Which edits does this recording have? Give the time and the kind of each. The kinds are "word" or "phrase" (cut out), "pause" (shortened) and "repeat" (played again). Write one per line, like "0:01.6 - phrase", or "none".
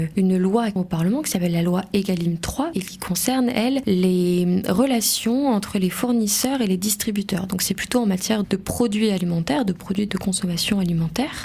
0:08.4 - word
0:10.1 - word